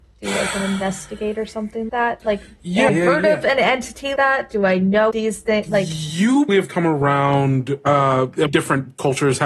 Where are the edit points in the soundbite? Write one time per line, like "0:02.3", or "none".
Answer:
0:01.9
0:02.9
0:04.2
0:05.1
0:06.5
0:08.5